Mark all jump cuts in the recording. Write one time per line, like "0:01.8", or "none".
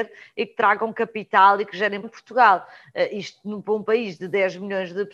0:02.0

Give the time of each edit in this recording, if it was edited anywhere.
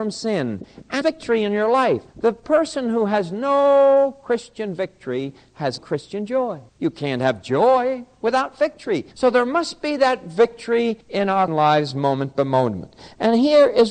0:01.0
0:02.1
0:05.8
0:06.7
0:09.1
0:11.0
0:11.5

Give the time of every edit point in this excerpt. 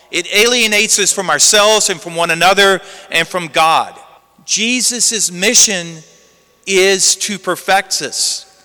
0:04.2

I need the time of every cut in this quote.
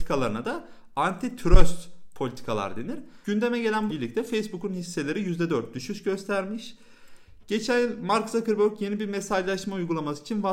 0:03.2
0:03.9

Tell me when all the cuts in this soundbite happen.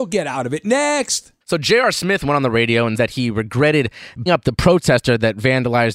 0:01.4
0:03.0
0:04.3

